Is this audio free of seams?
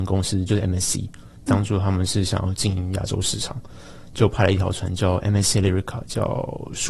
yes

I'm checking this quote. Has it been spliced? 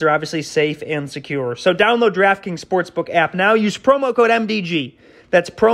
no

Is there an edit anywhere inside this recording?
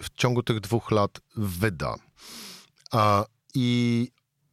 no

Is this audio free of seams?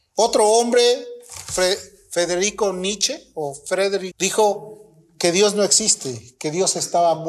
no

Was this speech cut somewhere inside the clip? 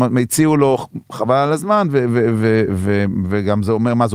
no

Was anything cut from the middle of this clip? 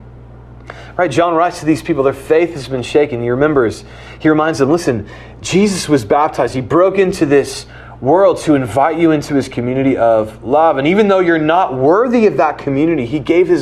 no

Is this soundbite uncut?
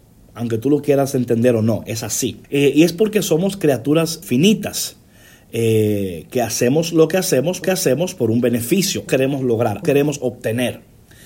no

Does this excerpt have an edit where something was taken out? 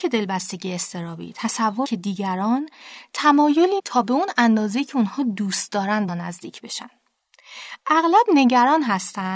yes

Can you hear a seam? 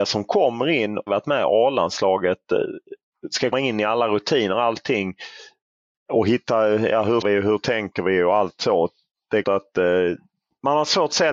yes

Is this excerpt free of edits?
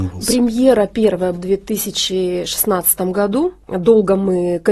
no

